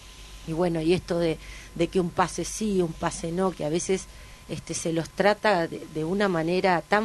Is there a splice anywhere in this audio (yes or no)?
no